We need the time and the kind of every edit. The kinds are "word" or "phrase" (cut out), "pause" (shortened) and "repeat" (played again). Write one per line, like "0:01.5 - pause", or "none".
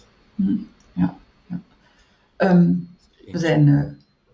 0:01.2 - pause